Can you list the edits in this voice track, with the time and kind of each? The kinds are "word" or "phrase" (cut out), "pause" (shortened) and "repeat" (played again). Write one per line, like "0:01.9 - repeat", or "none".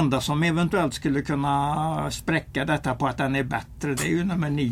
none